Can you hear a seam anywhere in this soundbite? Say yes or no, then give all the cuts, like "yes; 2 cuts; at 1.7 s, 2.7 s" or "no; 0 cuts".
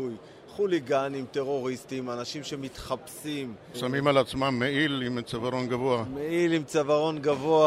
no; 0 cuts